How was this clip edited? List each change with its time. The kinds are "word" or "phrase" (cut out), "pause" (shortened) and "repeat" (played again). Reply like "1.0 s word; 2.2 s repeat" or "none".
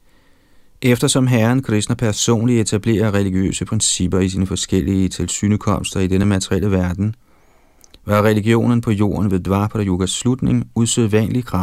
none